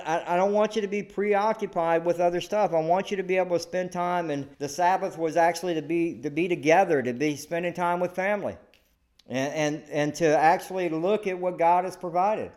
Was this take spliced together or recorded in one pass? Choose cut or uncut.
cut